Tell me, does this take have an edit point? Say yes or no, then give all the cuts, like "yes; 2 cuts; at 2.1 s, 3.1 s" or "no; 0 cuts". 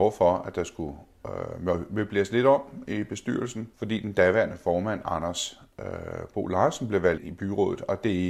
yes; 2 cuts; at 3.7 s, 7.2 s